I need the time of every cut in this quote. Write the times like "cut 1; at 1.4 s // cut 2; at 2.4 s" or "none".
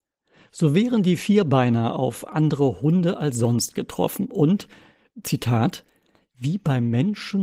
none